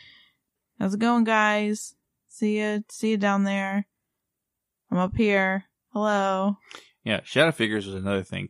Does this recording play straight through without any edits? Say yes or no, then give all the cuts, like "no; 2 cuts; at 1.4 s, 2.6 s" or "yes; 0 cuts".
yes; 0 cuts